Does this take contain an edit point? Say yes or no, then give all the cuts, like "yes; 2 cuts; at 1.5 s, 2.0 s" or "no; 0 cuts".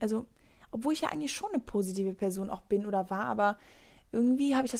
no; 0 cuts